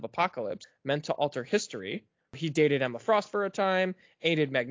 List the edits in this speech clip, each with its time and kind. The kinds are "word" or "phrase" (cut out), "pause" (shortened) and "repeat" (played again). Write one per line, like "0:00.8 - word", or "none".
none